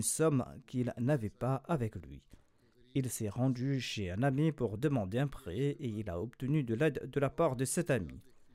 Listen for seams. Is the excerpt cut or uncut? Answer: uncut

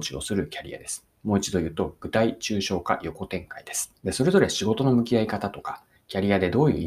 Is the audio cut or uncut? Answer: cut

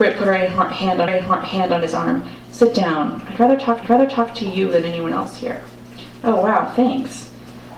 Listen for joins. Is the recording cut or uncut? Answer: cut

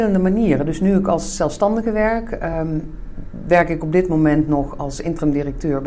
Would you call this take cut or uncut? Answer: uncut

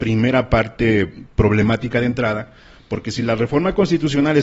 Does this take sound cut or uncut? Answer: uncut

